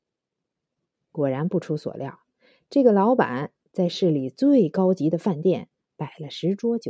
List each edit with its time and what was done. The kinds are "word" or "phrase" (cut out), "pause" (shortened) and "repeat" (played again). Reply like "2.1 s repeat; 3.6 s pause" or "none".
none

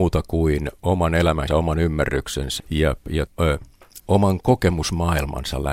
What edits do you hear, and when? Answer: 1.5 s word; 2.6 s word; 3.3 s word; 4.0 s word

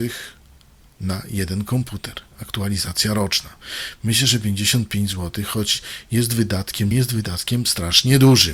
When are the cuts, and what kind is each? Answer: 6.9 s phrase

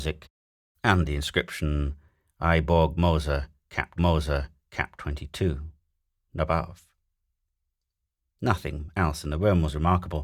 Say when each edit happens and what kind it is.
4.0 s repeat

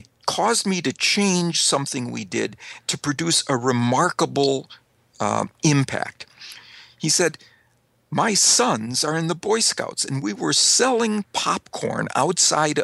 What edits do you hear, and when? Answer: none

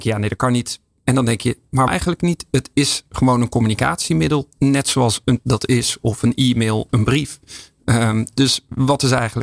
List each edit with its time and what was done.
1.9 s word; 5.4 s word; 6.9 s word

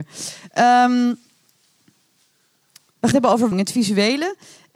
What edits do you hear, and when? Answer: 3.1 s word; 3.5 s word

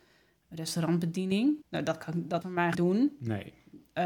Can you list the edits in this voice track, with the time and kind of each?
1.6 s pause; 2.4 s word; 2.7 s word

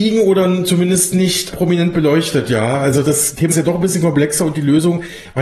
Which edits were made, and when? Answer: 3.5 s word

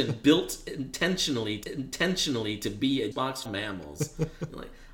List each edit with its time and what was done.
1.6 s repeat; 3.1 s word; 3.5 s phrase

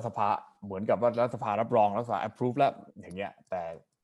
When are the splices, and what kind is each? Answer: 2.9 s pause

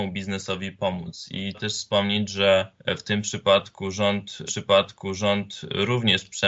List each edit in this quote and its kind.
1.5 s word; 2.8 s pause; 4.5 s repeat

